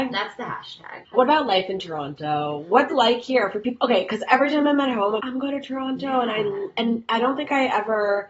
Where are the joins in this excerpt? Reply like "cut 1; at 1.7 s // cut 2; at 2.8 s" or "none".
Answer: cut 1; at 1.1 s // cut 2; at 2.9 s // cut 3; at 5.2 s